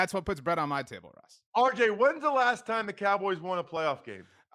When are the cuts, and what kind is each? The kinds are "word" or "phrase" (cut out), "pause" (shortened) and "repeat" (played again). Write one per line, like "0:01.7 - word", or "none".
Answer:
none

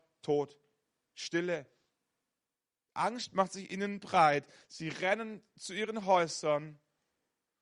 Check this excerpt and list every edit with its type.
none

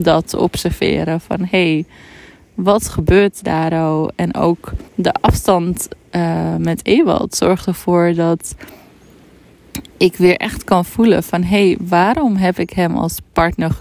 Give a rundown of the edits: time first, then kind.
0:04.9 - pause

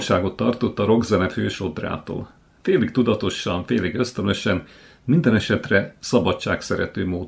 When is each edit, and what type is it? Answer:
none

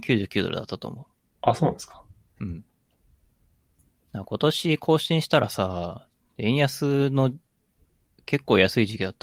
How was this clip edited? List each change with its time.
none

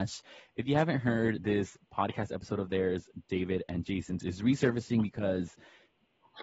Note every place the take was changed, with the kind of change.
none

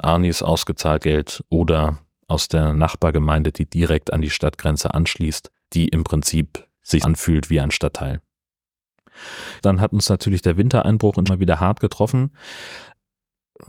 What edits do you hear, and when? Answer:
0:01.0 - word
0:07.0 - word
0:11.3 - word

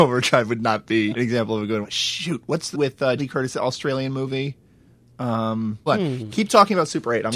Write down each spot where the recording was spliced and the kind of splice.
0:01.1 - word
0:01.8 - word
0:02.7 - word
0:03.2 - word
0:05.9 - word

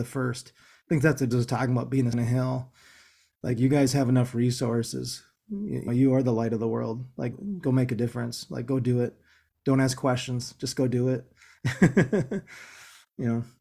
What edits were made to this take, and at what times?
0:01.3 - word
0:02.1 - word
0:05.9 - word
0:07.3 - word

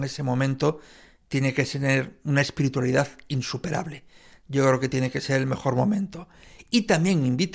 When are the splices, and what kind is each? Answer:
none

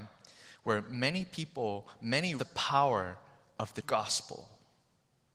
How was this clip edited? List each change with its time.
0:02.4 - word
0:03.8 - word

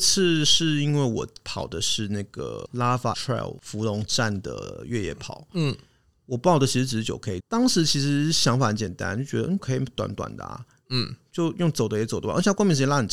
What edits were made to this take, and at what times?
0:03.1 - word
0:07.4 - word
0:09.6 - word

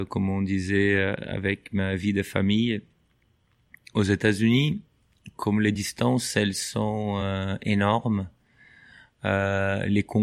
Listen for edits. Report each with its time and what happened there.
none

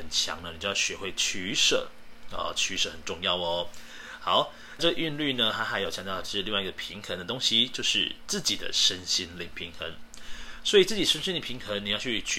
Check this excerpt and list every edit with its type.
0:04.8 - phrase

